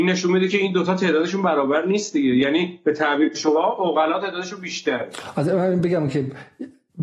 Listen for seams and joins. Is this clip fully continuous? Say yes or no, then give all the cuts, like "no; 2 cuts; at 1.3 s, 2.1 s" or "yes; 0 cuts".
yes; 0 cuts